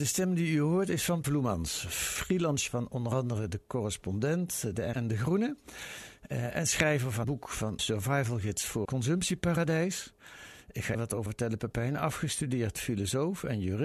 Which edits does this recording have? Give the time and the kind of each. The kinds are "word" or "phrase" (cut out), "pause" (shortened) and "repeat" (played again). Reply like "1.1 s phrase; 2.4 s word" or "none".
1.2 s word; 2.7 s word; 4.9 s word; 7.2 s word; 7.8 s word; 8.8 s word; 10.9 s word; 11.3 s word